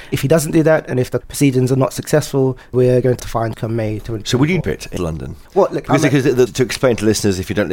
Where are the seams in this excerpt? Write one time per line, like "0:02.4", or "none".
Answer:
0:01.2
0:02.7
0:03.2
0:03.5
0:04.6
0:05.0
0:05.5
0:06.5